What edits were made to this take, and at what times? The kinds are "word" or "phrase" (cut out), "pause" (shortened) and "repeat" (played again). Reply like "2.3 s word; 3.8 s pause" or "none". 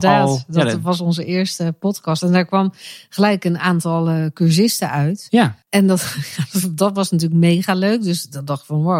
5.6 s pause

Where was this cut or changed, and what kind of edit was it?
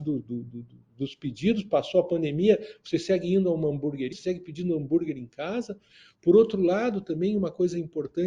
4.1 s word

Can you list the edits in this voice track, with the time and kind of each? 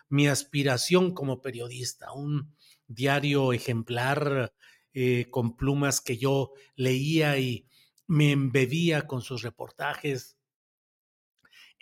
none

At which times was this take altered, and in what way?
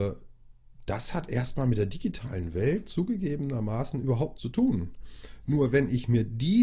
4.4 s word

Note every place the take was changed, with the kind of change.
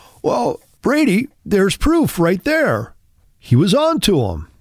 1.3 s pause

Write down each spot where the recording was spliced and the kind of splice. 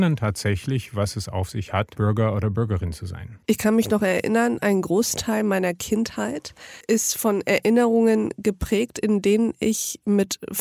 6.8 s pause

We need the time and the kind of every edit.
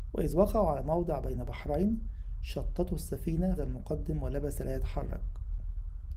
3.6 s word

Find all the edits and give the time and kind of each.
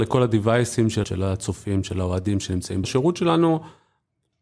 1.0 s word; 2.8 s phrase

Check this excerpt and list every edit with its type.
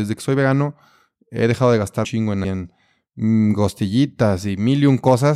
2.0 s word; 2.4 s phrase

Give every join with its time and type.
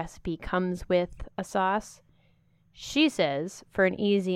none

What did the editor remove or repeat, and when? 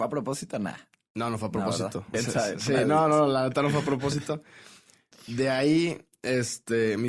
2.1 s phrase

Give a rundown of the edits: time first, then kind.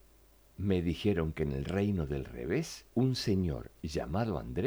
2.9 s pause

